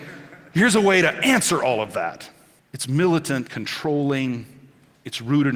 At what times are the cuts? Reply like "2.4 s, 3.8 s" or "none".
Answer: 2.6 s, 3.5 s